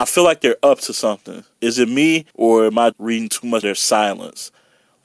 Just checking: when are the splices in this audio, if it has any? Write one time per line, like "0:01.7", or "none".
0:01.5
0:02.3
0:02.9
0:03.6